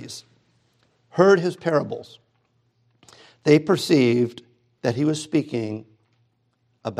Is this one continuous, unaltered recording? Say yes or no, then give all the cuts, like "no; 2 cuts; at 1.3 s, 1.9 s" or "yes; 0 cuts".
yes; 0 cuts